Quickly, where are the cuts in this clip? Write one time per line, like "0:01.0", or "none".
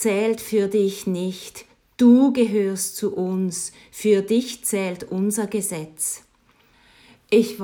none